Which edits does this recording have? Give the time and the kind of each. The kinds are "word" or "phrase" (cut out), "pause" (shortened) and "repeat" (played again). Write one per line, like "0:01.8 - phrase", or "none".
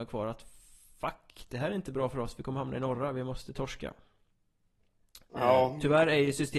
none